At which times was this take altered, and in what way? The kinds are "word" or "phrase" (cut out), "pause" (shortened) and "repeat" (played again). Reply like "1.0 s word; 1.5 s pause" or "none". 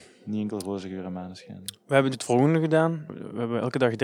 2.1 s word